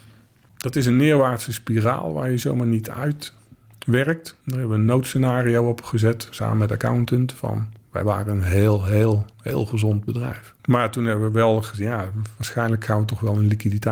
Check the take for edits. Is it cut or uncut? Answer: cut